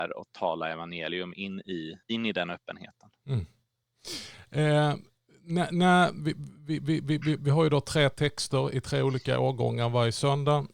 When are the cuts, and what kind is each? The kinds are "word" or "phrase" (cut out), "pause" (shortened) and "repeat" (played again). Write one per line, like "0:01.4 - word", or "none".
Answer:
0:02.0 - pause